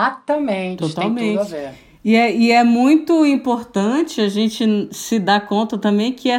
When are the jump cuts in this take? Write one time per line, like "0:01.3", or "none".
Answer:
none